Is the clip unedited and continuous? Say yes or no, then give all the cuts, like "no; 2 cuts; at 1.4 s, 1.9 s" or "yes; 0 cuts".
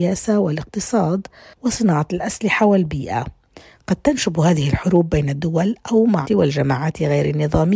no; 1 cut; at 6.2 s